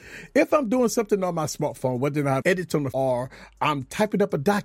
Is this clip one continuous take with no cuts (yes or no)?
no